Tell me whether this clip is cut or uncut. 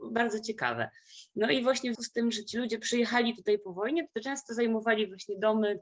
cut